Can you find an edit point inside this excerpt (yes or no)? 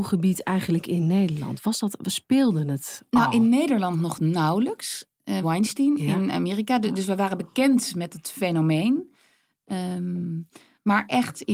yes